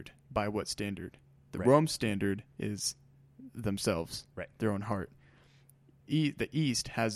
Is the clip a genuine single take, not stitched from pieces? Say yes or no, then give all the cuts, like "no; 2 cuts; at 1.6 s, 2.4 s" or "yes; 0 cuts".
no; 1 cut; at 4.3 s